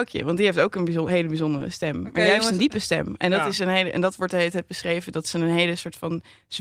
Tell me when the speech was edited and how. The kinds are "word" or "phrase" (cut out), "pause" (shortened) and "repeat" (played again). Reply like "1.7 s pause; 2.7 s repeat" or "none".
none